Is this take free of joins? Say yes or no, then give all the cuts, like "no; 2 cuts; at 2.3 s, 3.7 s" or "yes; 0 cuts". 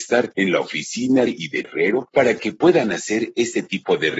no; 2 cuts; at 1.3 s, 1.6 s